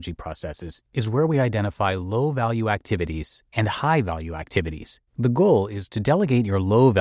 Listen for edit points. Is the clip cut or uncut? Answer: cut